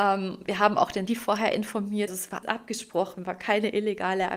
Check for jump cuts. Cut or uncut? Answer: cut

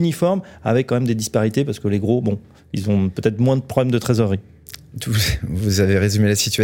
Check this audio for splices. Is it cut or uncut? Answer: uncut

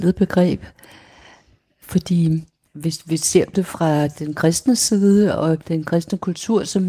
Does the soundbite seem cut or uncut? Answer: cut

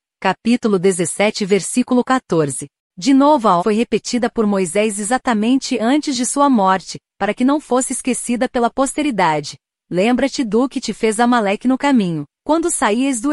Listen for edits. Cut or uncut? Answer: cut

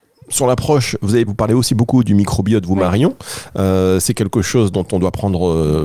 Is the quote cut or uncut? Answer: cut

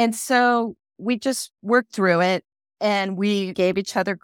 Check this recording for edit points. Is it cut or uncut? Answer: uncut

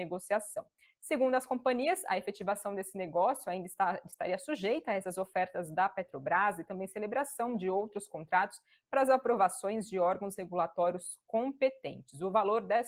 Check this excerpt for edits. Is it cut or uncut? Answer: uncut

